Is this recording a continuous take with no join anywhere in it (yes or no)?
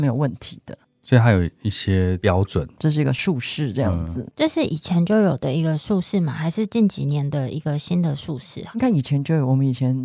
no